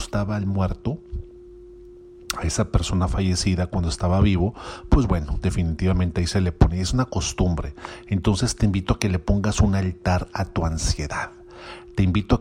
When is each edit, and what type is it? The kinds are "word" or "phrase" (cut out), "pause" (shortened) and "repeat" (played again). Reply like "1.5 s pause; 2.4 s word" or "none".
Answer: none